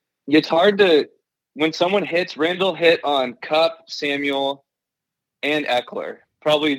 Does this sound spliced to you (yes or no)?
no